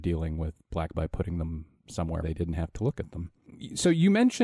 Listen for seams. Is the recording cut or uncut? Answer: cut